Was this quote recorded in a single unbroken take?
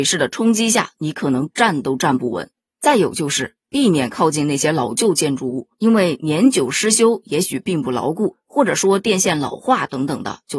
yes; 0 cuts

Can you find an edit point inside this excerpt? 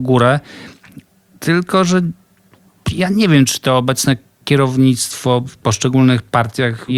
no; 0 cuts

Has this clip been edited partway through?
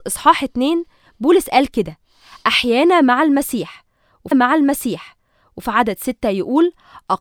yes; 1 cut; at 4.3 s

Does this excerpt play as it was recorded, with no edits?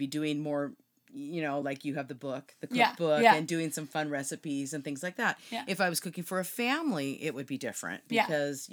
yes; 0 cuts

